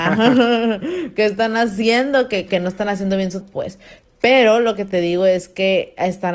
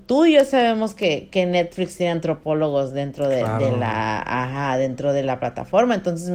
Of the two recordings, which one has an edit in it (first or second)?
first